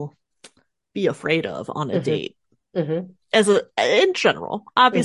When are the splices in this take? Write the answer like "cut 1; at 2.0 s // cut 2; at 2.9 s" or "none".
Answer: none